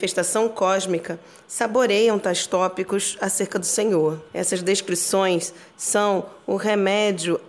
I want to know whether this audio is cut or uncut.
cut